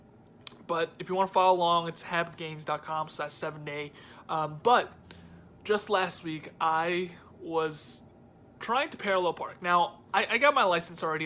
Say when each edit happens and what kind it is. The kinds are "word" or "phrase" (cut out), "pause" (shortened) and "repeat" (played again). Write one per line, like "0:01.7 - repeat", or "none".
none

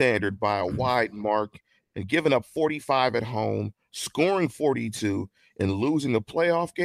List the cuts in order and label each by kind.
none

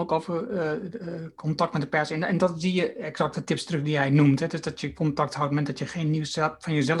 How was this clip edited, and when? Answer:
none

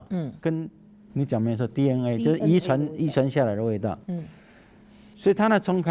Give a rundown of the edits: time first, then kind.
none

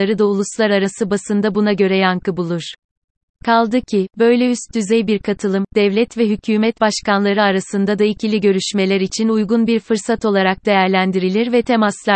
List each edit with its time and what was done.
none

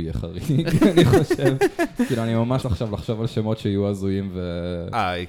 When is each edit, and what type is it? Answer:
0:02.6 - word

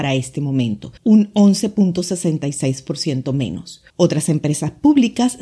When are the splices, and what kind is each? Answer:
0:01.0 - pause
0:03.9 - pause

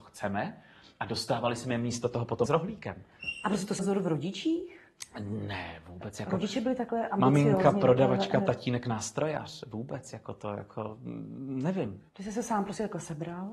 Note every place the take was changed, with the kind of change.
0:02.5 - word
0:03.8 - word
0:12.1 - pause

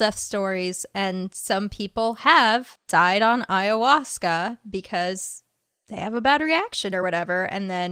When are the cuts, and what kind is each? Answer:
none

